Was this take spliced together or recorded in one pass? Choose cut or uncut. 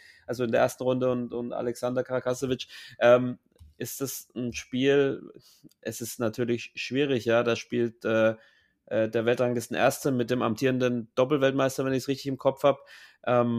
uncut